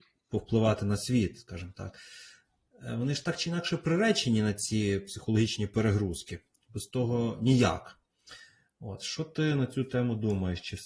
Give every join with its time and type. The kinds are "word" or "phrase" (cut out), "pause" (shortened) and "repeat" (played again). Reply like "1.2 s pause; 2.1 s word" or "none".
none